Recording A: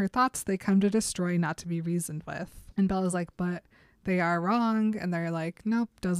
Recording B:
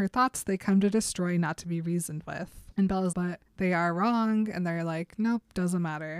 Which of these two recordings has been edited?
B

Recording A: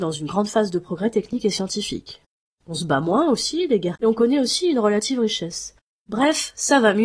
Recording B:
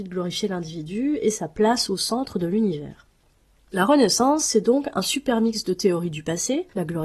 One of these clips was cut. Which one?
A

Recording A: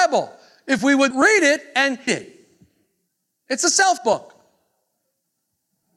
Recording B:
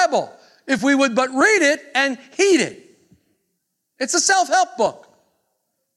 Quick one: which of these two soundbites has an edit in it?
A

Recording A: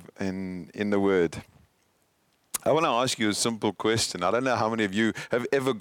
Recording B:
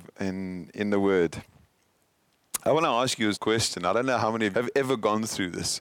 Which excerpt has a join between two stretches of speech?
B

